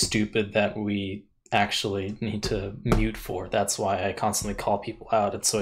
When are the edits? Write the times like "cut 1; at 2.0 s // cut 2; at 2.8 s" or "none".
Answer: none